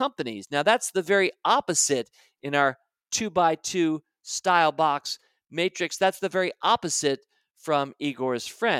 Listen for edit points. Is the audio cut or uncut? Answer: uncut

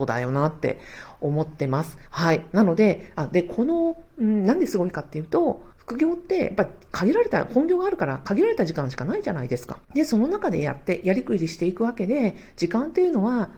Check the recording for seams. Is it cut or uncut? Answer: cut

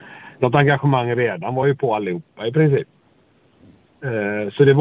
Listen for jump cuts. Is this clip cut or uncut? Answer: uncut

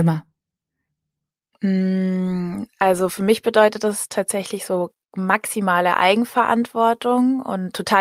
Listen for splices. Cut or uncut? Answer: uncut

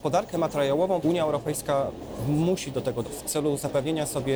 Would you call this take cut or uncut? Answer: cut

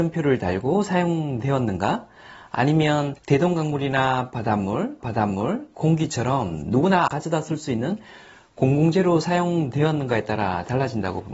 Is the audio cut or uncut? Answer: cut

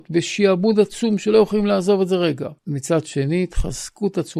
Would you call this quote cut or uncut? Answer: cut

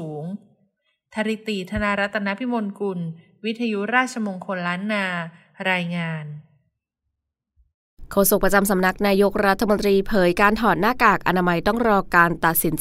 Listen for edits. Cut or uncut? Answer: uncut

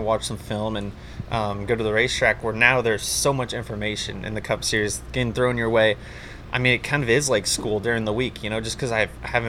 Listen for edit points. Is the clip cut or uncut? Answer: uncut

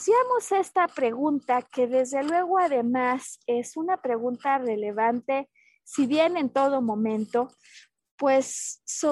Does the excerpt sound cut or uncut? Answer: uncut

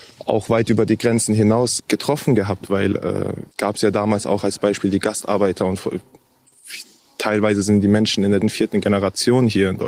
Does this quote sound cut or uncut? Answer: cut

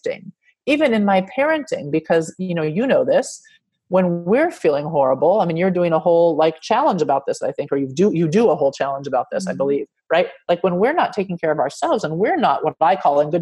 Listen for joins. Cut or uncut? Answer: uncut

